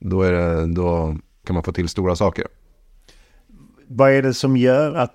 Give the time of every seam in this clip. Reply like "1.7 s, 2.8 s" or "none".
1.4 s